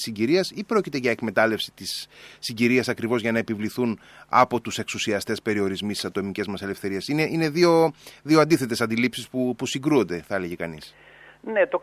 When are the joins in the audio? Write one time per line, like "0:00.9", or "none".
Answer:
none